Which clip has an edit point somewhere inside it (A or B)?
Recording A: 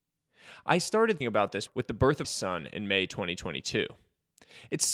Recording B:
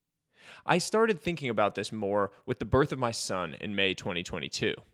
A